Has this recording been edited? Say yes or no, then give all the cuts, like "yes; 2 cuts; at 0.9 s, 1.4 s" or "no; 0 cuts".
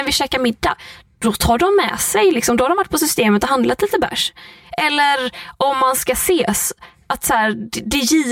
no; 0 cuts